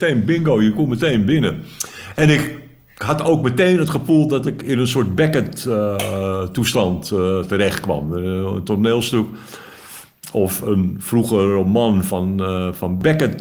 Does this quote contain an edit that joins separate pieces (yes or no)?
no